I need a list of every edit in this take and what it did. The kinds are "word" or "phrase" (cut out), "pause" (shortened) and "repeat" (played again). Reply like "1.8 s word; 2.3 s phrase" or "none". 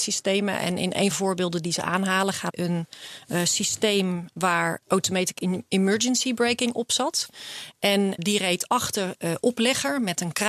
1.1 s phrase; 2.5 s phrase; 4.8 s word; 8.2 s word; 9.2 s word